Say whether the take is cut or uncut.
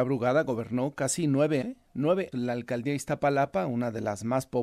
cut